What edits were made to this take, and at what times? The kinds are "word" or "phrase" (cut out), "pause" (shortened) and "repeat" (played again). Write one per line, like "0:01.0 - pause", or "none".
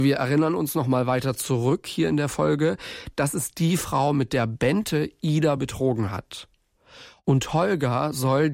none